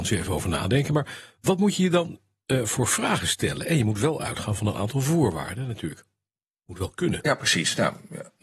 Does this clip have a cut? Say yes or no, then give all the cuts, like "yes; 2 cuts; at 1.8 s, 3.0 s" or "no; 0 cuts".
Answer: no; 0 cuts